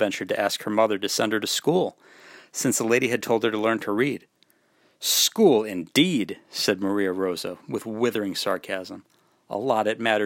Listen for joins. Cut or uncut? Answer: uncut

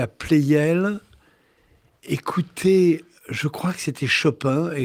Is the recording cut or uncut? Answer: cut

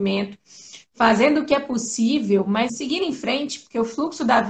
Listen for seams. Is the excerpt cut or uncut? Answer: cut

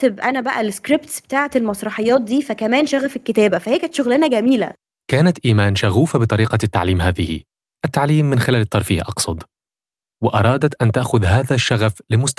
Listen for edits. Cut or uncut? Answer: uncut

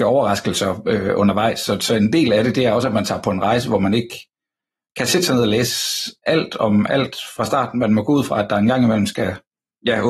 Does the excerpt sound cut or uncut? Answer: uncut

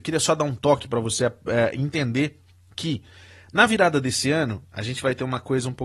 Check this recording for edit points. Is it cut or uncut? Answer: uncut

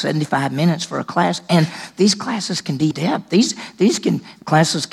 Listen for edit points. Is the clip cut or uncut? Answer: cut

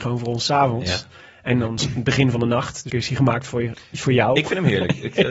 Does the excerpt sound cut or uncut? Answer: cut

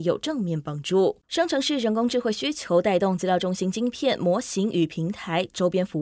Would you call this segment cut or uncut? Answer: cut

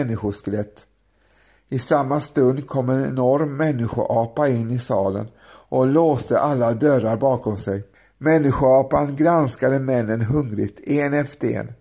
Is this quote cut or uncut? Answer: cut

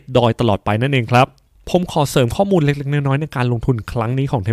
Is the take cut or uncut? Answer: uncut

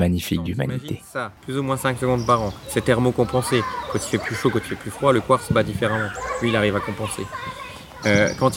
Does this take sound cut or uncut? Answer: cut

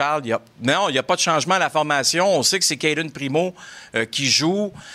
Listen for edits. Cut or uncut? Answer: uncut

